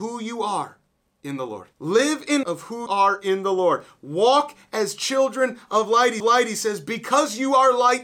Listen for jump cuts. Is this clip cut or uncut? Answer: cut